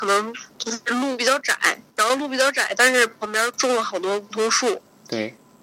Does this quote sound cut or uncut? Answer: cut